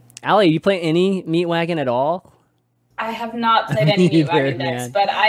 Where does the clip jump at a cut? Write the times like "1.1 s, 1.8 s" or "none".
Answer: none